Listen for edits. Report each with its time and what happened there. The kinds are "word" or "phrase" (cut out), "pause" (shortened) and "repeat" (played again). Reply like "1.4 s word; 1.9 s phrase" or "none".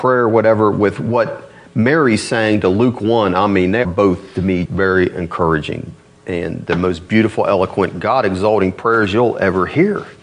3.8 s word; 4.7 s word